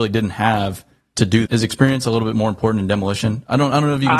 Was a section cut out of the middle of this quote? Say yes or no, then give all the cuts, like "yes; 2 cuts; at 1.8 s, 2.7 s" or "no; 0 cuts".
yes; 1 cut; at 1.5 s